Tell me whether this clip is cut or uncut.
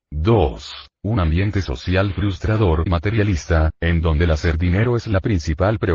cut